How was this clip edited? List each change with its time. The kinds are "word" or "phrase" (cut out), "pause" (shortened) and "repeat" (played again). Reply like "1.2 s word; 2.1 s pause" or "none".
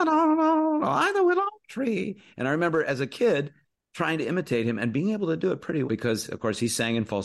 3.7 s pause; 5.8 s word